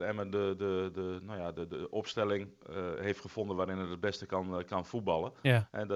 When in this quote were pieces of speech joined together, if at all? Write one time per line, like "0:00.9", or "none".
none